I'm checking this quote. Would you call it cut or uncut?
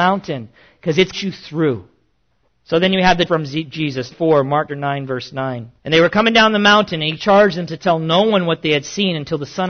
cut